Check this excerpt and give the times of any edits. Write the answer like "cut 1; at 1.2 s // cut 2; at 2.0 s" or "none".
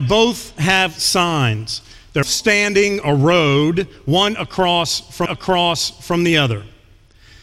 cut 1; at 2.2 s // cut 2; at 3.0 s // cut 3; at 5.3 s